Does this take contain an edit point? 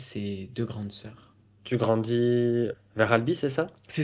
no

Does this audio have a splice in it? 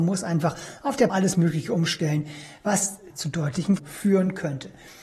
yes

